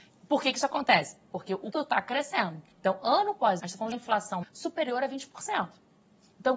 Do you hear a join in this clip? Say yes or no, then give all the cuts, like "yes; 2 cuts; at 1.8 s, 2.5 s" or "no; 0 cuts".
yes; 5 cuts; at 1.7 s, 2.7 s, 3.6 s, 3.9 s, 4.4 s